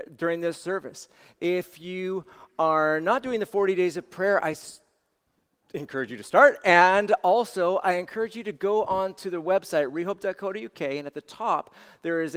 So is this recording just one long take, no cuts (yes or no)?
yes